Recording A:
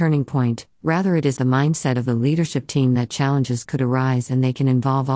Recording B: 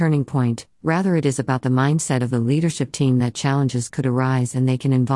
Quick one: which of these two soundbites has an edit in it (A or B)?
A